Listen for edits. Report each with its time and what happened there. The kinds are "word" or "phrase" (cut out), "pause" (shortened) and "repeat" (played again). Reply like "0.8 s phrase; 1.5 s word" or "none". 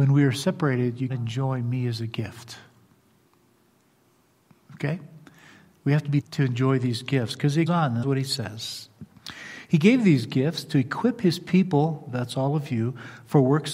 1.1 s word; 6.2 s word; 7.7 s word; 8.0 s word